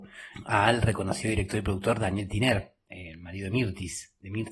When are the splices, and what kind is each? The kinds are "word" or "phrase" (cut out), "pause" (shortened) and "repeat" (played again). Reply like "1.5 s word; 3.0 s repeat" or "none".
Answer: none